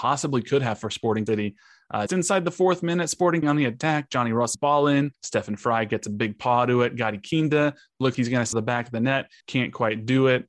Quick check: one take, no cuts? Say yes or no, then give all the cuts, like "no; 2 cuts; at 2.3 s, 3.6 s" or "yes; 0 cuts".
no; 8 cuts; at 1.3 s, 2.1 s, 3.4 s, 4.5 s, 5.1 s, 8.1 s, 8.5 s, 9.4 s